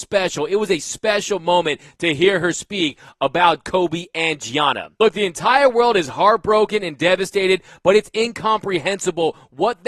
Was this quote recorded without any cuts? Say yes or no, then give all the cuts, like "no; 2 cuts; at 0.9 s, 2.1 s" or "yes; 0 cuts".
yes; 0 cuts